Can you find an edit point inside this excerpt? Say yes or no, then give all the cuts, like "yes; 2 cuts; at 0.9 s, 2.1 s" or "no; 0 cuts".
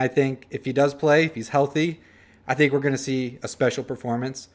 no; 0 cuts